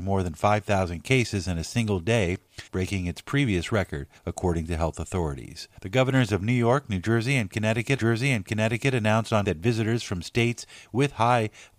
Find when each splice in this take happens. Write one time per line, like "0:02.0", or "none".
0:02.7
0:04.2
0:05.8
0:08.0
0:09.4